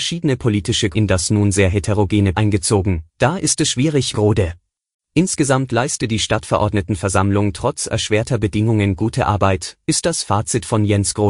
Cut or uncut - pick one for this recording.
cut